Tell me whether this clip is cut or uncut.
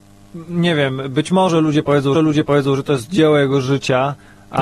cut